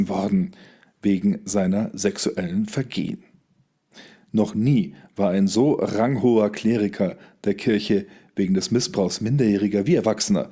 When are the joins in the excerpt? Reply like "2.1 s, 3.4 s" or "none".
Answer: none